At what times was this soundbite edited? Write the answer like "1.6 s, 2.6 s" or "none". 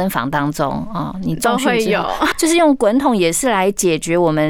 2.3 s